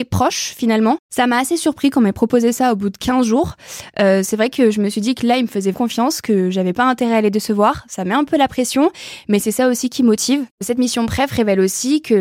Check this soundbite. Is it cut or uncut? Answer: cut